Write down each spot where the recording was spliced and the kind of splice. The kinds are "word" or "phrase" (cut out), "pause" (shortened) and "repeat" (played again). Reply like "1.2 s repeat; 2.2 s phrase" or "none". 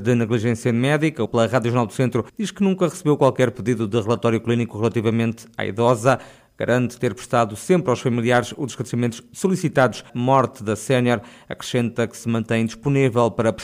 1.3 s phrase; 2.3 s pause; 10.1 s phrase